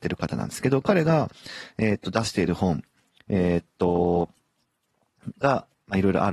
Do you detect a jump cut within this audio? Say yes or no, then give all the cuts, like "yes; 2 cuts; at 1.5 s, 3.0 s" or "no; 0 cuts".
no; 0 cuts